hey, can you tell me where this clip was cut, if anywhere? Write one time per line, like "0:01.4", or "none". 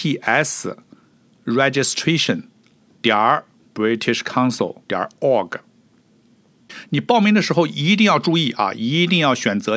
0:03.5
0:04.8